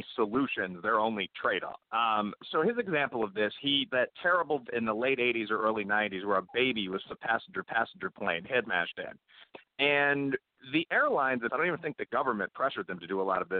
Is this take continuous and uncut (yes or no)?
no